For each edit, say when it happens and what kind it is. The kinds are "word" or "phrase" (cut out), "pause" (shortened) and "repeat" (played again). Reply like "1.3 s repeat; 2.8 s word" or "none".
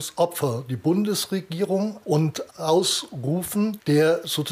2.0 s word; 2.5 s phrase